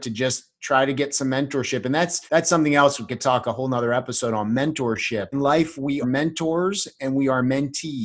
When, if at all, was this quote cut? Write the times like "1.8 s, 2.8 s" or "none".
2.3 s, 3.1 s, 5.3 s, 6.0 s